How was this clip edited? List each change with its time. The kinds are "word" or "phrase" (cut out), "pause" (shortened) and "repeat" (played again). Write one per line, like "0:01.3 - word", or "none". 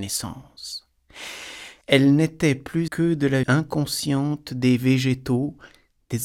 0:01.8 - pause
0:02.9 - word
0:03.4 - word